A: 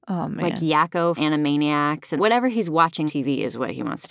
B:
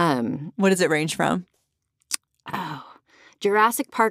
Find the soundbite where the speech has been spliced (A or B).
A